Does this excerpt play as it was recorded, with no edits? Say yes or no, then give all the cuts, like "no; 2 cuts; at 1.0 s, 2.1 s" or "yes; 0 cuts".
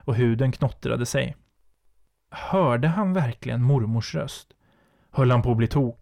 yes; 0 cuts